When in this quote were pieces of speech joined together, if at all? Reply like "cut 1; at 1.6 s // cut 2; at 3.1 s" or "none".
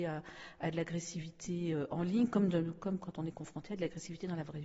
none